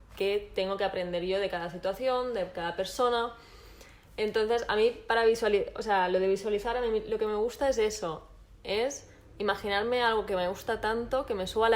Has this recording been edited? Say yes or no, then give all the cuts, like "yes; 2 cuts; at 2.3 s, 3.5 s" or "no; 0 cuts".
no; 0 cuts